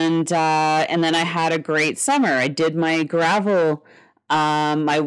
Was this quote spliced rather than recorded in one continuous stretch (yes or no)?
no